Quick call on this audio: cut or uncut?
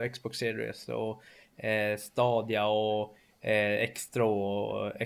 uncut